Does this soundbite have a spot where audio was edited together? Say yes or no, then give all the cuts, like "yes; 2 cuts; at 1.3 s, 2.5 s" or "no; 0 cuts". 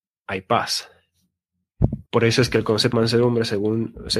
yes; 2 cuts; at 2.1 s, 2.9 s